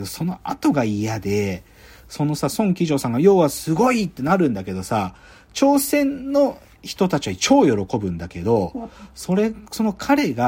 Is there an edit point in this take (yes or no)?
no